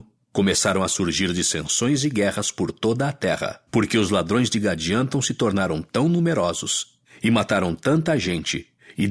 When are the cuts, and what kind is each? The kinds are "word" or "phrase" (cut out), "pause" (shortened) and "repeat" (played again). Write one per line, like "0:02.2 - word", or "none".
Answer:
0:03.7 - pause